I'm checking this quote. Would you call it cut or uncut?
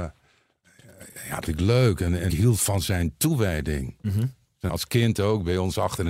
cut